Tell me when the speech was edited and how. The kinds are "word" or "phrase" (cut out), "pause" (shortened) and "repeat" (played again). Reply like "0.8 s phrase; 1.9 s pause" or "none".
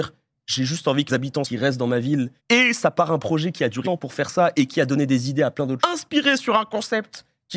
1.1 s word; 1.4 s phrase; 2.4 s pause; 3.8 s word; 5.8 s word